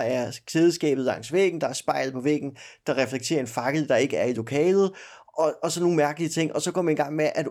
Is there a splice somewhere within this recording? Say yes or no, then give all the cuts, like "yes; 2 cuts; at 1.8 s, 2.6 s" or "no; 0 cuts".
no; 0 cuts